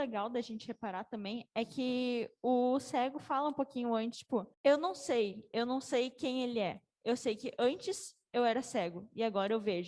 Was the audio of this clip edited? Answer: yes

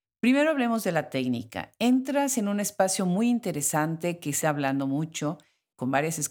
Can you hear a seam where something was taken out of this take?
yes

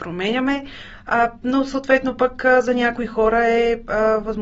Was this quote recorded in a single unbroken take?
yes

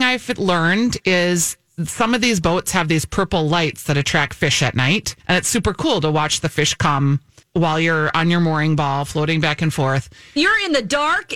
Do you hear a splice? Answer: yes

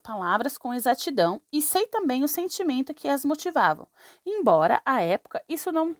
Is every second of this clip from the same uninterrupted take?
yes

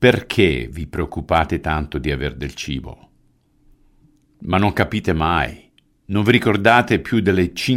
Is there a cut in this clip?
no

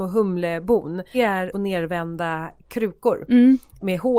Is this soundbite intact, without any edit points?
no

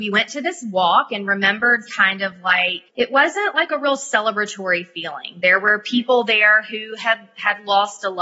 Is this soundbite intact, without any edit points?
no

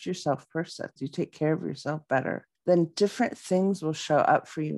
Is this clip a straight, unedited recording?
no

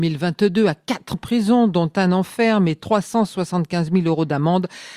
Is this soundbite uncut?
no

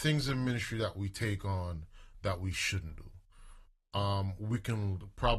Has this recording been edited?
no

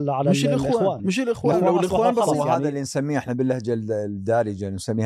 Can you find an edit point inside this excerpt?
yes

